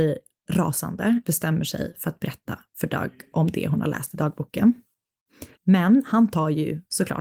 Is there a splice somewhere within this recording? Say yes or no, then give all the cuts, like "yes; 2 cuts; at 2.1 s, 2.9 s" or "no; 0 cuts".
yes; 2 cuts; at 1.2 s, 5.5 s